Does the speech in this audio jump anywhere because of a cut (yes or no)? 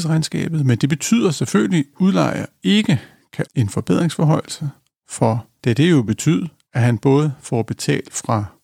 yes